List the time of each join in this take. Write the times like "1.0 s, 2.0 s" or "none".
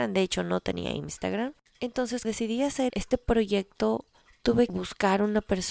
2.2 s, 2.9 s, 4.7 s

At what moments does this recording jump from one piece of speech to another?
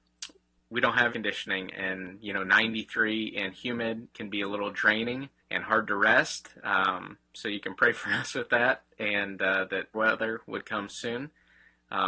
1.1 s, 4.1 s, 5.4 s, 9.9 s

